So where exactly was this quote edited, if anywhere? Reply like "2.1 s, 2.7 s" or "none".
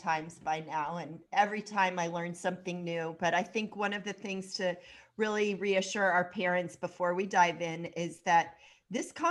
none

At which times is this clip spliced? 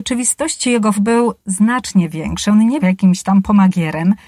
0.9 s, 2.8 s

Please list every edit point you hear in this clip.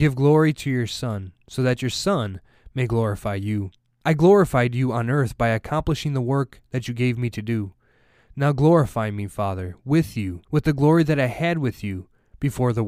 3.9 s, 10.4 s

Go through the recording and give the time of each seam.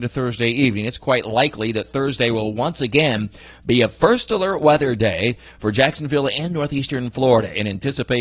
none

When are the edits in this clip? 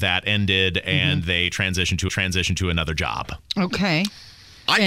2.1 s

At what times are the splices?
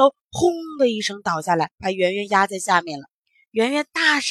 1.7 s, 3.2 s

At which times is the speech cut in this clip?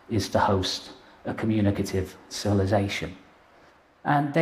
none

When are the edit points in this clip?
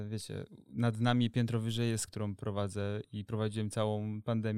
2.1 s

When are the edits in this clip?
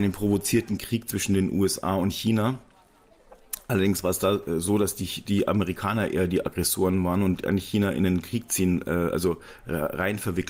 none

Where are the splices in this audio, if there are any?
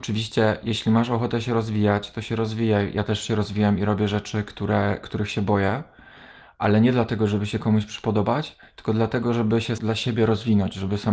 9.8 s

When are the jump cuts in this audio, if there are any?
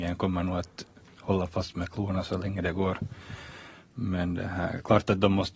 none

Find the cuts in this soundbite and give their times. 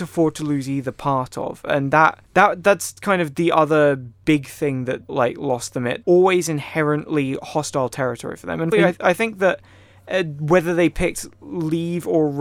2.2 s, 5.1 s, 6.0 s, 8.7 s

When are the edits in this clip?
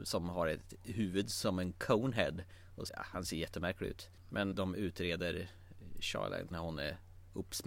2.9 s, 4.5 s, 6.5 s

